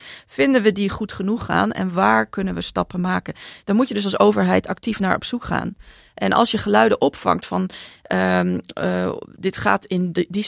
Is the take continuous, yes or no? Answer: yes